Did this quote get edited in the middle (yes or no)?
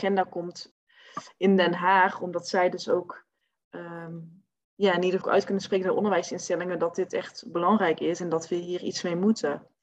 yes